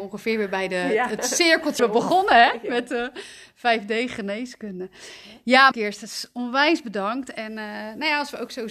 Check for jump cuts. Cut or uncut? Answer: cut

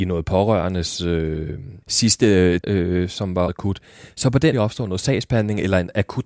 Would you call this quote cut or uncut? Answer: cut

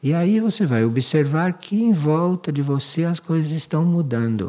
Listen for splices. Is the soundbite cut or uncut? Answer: uncut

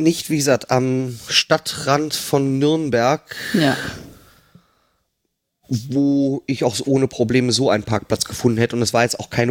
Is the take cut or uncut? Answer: uncut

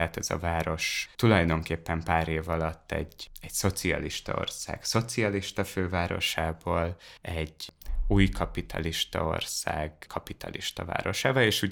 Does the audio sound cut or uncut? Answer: cut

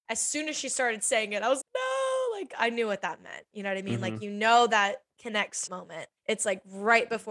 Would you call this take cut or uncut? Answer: cut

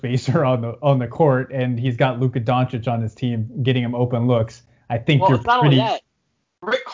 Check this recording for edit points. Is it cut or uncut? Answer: uncut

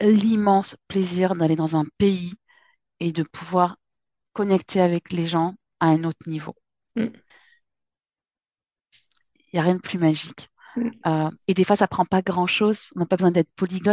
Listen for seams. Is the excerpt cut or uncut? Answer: uncut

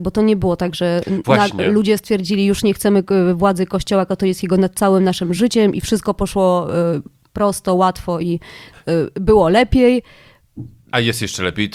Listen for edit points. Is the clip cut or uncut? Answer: uncut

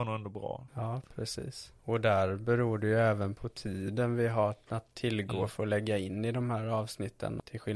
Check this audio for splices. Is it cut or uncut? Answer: uncut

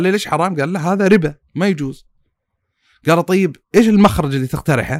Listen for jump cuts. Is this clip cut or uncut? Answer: uncut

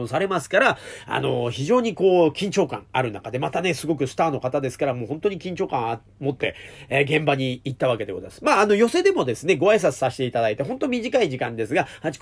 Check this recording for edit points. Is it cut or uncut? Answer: uncut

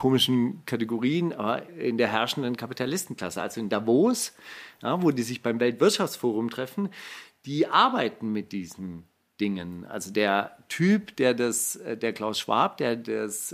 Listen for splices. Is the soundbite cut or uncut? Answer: uncut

